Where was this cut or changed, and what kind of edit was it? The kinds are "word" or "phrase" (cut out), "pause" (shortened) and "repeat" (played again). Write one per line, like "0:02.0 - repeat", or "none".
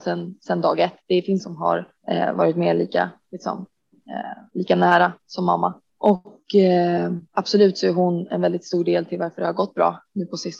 0:01.4 - word
0:02.0 - pause
0:05.9 - pause
0:07.3 - pause